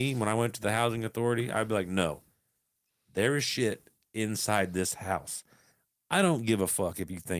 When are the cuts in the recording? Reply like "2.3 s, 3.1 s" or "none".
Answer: none